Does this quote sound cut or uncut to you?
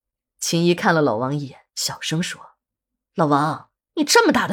cut